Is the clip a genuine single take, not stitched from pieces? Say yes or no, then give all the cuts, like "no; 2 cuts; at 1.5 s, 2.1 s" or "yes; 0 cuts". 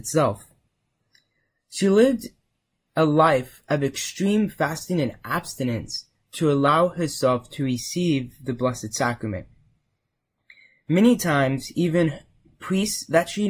yes; 0 cuts